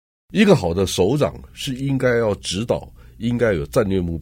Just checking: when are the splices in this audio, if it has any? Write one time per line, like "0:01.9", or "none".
none